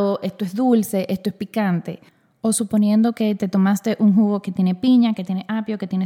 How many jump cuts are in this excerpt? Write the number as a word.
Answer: zero